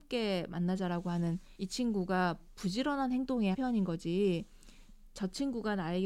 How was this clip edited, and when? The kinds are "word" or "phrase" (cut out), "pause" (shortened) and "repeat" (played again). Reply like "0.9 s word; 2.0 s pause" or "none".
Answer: 1.6 s word; 3.5 s word